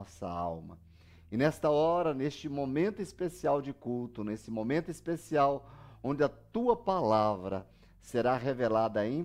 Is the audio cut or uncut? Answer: uncut